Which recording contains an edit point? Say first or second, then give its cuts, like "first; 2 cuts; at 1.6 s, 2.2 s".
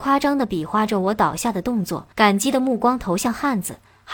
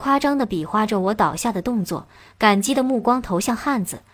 first; 1 cut; at 2.1 s